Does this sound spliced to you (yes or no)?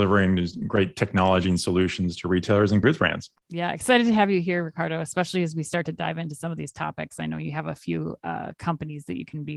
yes